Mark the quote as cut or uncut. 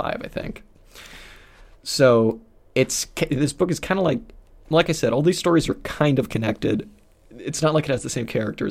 uncut